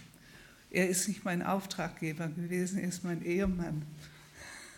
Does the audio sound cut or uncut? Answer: uncut